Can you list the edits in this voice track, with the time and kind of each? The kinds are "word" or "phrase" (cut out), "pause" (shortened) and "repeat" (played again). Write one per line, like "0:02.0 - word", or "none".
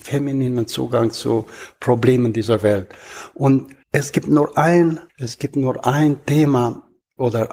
0:03.8 - pause
0:05.1 - pause